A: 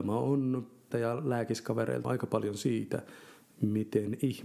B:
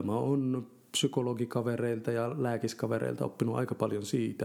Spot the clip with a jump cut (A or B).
A